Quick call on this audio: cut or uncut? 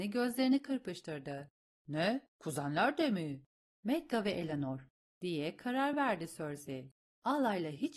uncut